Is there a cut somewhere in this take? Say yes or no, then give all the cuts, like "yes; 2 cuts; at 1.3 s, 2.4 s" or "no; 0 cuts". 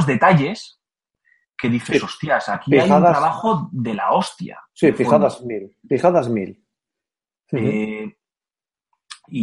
no; 0 cuts